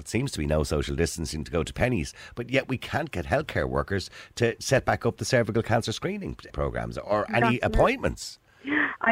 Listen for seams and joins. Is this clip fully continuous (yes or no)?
no